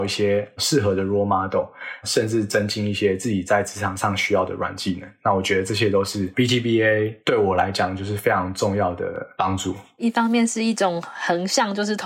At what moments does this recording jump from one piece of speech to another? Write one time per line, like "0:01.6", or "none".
none